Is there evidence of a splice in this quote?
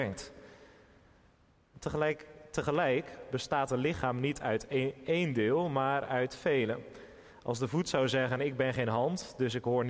no; 0 cuts

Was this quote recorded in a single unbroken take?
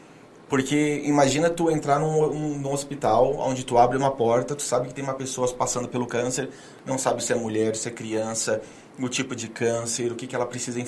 yes; 0 cuts

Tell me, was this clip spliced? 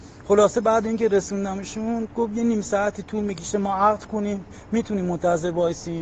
no; 0 cuts

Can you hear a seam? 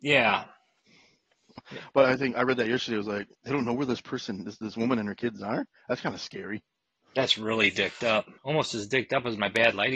yes; 4 cuts; at 1.6 s, 3.3 s, 6.8 s, 8.4 s

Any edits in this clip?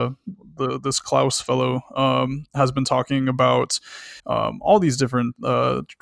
yes; 1 cut; at 4.2 s

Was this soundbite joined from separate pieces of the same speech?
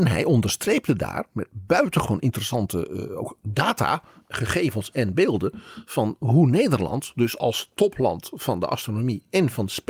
no; 0 cuts

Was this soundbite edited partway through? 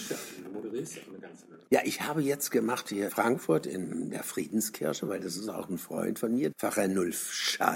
yes; 3 cuts; at 1.7 s, 3.1 s, 6.5 s

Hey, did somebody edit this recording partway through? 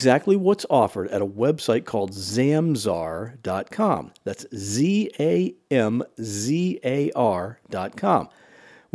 no; 0 cuts

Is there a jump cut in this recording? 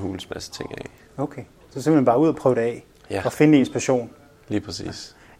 no; 0 cuts

